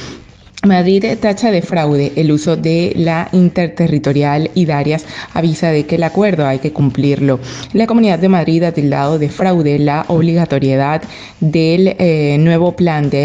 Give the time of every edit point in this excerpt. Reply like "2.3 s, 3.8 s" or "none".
none